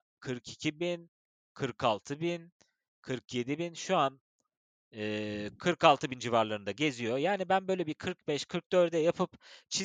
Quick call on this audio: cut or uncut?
uncut